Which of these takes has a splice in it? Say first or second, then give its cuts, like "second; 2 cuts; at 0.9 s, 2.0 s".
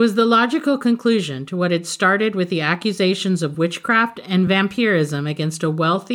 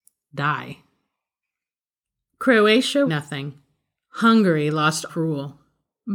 second; 2 cuts; at 3.1 s, 5.1 s